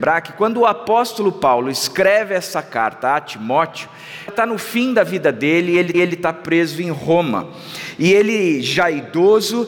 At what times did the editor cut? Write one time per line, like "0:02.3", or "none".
0:04.3
0:05.9